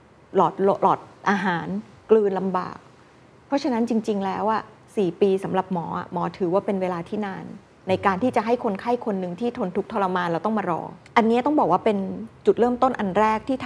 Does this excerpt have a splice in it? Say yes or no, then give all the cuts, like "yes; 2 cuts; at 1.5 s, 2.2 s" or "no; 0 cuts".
no; 0 cuts